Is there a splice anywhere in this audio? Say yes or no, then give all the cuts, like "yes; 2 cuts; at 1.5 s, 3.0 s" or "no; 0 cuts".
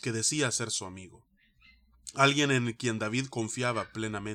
no; 0 cuts